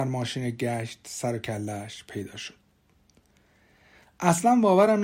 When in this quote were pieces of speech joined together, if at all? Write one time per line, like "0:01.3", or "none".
none